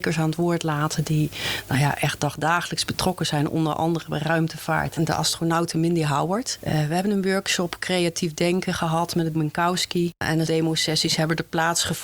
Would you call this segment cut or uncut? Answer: cut